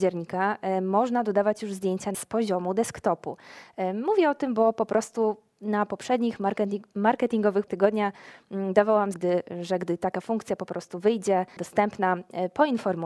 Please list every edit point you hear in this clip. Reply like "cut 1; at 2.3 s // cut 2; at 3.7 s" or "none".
cut 1; at 2.1 s // cut 2; at 7.7 s // cut 3; at 9.1 s // cut 4; at 11.6 s